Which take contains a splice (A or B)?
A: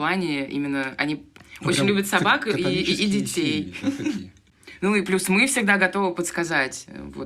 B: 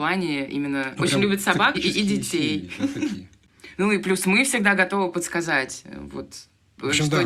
B